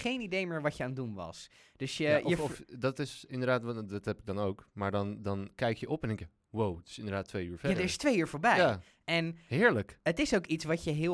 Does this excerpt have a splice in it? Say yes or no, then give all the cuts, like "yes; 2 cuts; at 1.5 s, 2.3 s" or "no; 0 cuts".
no; 0 cuts